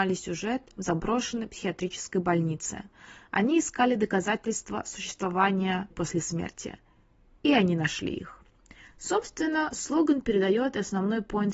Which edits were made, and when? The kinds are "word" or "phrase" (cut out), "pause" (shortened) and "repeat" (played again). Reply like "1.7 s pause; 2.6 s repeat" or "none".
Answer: 5.9 s word